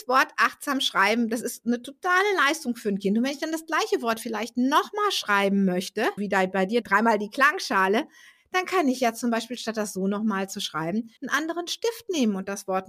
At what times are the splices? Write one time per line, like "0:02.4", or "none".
0:06.2
0:06.8
0:11.2